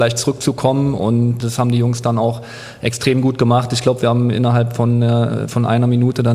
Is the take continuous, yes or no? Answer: no